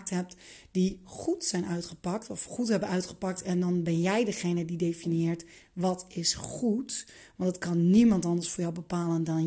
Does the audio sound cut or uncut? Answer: uncut